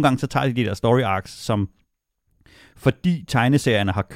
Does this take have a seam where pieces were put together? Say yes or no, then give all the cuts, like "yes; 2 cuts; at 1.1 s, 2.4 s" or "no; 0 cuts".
no; 0 cuts